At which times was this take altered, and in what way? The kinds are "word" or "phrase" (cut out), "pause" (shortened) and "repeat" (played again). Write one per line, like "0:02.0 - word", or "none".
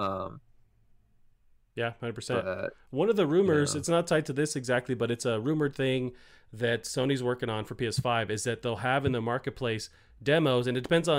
none